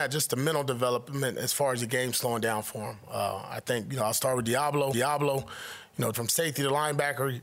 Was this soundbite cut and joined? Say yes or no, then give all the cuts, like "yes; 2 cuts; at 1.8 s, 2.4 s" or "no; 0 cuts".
yes; 2 cuts; at 4.9 s, 6.1 s